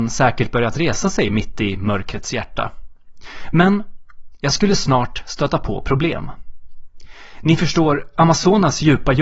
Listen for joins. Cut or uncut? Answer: uncut